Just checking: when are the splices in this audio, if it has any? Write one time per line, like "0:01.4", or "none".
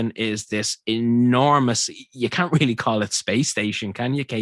none